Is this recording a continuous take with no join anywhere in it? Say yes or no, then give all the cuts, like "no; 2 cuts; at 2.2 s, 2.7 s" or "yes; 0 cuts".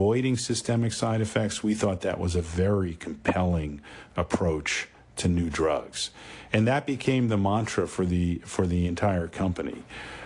yes; 0 cuts